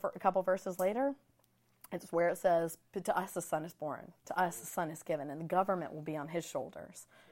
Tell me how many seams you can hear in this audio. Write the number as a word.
one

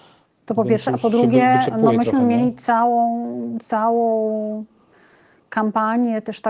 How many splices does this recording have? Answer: zero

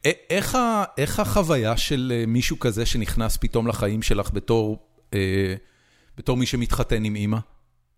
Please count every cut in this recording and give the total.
zero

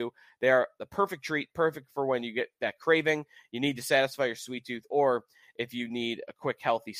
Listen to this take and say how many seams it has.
zero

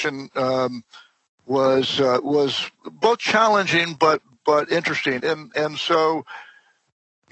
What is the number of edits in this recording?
one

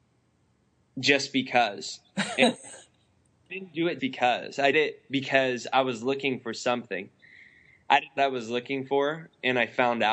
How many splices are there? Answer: four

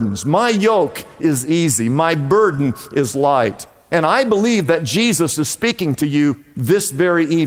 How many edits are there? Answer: zero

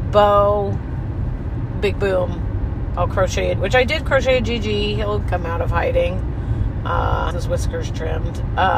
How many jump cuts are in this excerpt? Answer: four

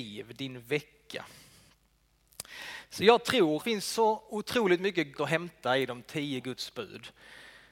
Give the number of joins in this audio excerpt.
two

